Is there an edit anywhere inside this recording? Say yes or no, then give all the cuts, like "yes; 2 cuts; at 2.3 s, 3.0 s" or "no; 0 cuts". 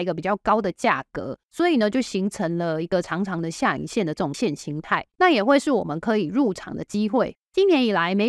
yes; 2 cuts; at 1.4 s, 4.3 s